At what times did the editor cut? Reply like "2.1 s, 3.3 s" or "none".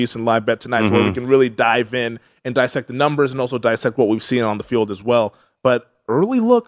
none